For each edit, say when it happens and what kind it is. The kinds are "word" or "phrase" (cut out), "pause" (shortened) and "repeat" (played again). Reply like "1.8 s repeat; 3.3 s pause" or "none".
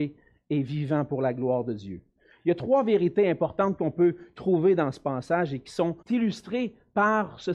6.0 s pause